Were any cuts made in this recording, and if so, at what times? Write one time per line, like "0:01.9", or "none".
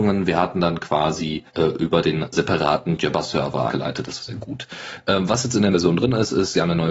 0:01.5
0:02.3
0:03.7
0:04.2
0:05.7